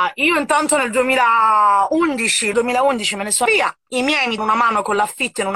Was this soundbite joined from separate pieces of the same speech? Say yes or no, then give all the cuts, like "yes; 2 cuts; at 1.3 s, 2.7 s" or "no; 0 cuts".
yes; 4 cuts; at 2.5 s, 3.5 s, 3.9 s, 4.4 s